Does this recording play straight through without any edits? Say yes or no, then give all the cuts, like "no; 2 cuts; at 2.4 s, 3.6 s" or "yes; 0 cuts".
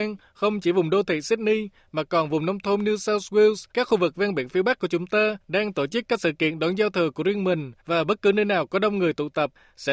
no; 3 cuts; at 3.7 s, 5.4 s, 7.8 s